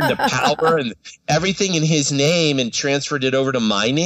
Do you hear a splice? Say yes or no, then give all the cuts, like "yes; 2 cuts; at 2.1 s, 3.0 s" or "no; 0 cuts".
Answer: no; 0 cuts